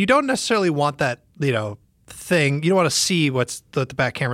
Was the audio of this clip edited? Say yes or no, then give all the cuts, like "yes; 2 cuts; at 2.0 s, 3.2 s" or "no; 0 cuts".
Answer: no; 0 cuts